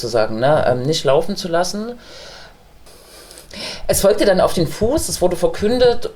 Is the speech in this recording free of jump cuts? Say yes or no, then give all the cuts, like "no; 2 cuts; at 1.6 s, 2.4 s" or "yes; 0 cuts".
yes; 0 cuts